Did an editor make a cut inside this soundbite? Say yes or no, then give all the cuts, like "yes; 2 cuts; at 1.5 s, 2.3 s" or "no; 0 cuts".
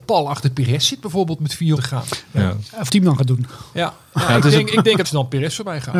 yes; 3 cuts; at 1.8 s, 2.9 s, 5.0 s